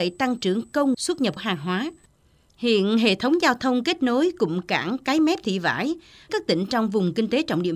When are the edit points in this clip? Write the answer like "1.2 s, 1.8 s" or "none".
0.9 s, 1.4 s, 6.3 s

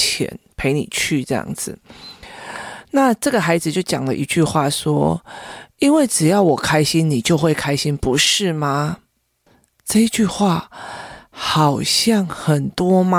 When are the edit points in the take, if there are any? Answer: 9.5 s

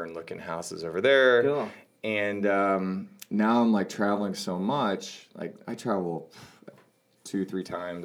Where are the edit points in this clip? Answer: none

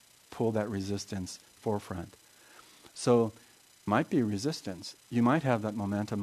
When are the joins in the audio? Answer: 1.6 s, 3.9 s

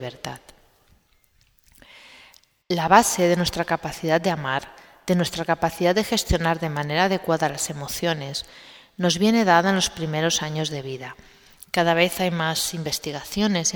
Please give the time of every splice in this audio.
none

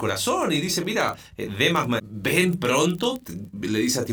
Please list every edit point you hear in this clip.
2.0 s

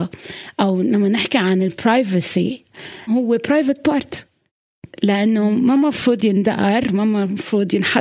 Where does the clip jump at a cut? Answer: 3.1 s, 4.9 s

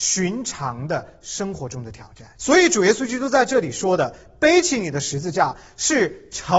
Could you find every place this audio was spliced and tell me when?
2.4 s

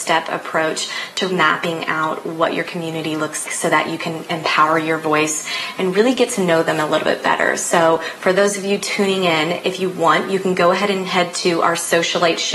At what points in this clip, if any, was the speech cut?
1.3 s, 3.5 s

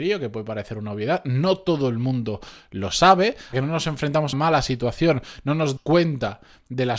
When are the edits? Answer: 3.5 s, 4.3 s, 5.8 s

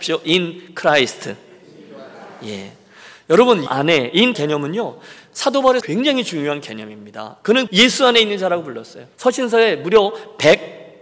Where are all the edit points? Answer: 3.7 s, 4.3 s, 5.8 s, 7.7 s, 9.1 s

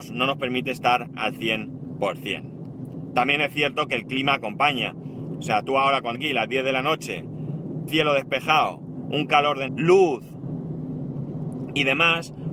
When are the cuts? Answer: 6.1 s, 7.9 s, 9.7 s

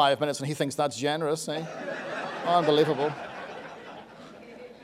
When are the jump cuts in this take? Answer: none

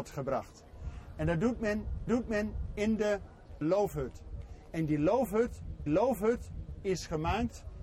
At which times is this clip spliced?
2.1 s, 3.6 s, 5.9 s

